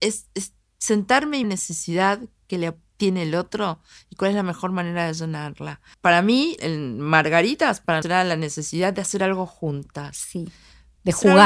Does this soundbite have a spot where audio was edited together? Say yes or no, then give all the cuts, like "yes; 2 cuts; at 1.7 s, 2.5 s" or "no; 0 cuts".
yes; 4 cuts; at 1.4 s, 5.9 s, 6.6 s, 8.0 s